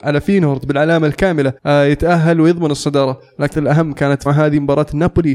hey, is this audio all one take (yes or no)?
no